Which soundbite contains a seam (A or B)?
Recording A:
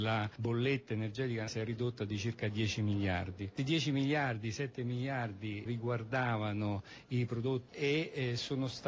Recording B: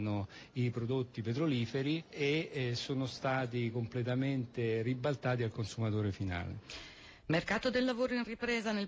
A